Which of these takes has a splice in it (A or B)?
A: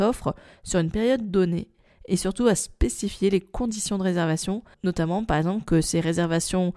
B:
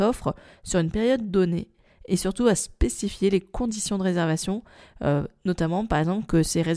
A